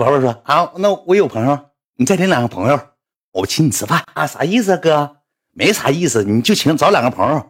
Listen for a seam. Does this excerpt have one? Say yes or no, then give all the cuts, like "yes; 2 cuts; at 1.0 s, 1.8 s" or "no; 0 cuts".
no; 0 cuts